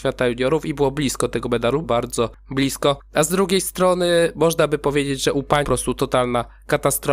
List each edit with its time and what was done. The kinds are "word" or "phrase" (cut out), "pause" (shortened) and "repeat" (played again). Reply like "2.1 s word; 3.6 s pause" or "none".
1.8 s word; 5.6 s phrase